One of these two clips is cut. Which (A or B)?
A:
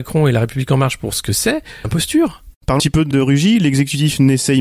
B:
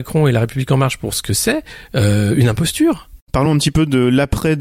A